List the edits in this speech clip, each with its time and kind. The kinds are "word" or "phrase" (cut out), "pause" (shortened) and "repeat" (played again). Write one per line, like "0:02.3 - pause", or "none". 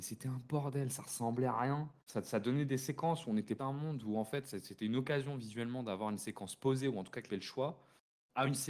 0:02.0 - pause
0:03.6 - word
0:07.3 - word